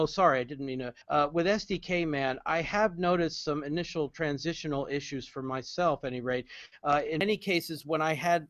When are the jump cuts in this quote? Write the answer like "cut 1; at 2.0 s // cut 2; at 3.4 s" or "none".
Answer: cut 1; at 1.0 s